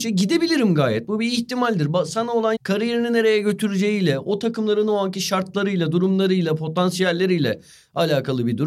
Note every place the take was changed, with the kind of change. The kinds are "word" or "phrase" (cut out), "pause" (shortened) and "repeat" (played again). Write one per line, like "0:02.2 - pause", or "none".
0:02.5 - word